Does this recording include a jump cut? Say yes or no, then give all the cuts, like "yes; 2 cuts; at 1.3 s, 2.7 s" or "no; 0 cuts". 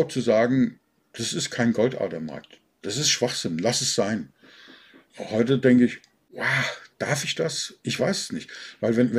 no; 0 cuts